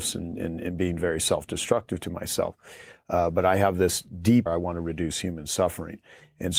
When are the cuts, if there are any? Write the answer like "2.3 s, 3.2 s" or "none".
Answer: 4.5 s